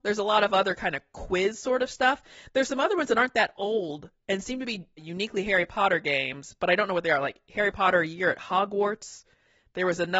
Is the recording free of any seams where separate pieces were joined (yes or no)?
yes